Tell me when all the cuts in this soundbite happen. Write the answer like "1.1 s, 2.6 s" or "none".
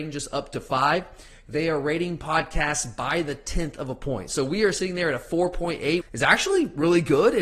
6.0 s